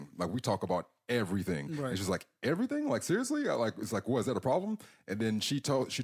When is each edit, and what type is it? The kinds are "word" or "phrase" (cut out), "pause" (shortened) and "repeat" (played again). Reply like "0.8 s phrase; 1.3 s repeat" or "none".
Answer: none